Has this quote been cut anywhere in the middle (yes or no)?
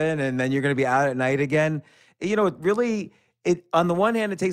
no